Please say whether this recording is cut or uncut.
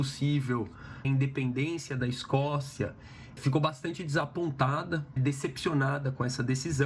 cut